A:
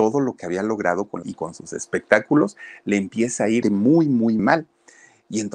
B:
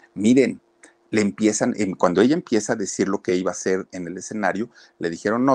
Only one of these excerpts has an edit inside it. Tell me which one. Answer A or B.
A